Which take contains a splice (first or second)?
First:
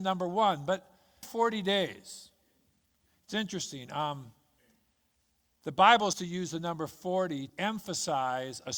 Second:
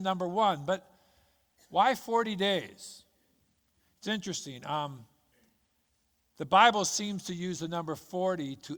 first